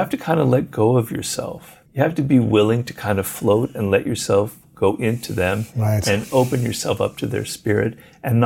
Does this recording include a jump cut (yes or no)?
yes